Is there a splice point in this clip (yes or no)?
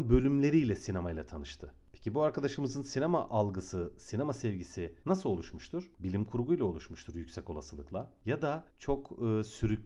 yes